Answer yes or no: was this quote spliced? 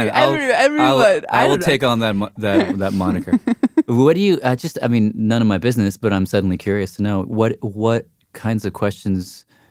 yes